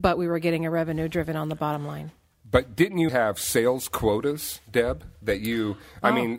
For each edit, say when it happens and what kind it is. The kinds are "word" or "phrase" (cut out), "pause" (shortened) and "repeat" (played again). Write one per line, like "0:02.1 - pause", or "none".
0:03.1 - word